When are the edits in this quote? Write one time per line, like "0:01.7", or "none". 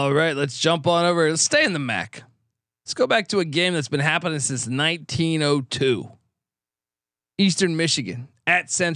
none